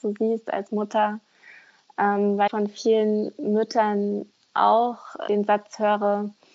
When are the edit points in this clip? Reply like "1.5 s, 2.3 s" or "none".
2.5 s, 5.3 s